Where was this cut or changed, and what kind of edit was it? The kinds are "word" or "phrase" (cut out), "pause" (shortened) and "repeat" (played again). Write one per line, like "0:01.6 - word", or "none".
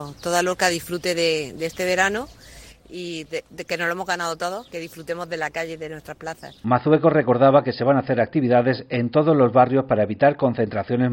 none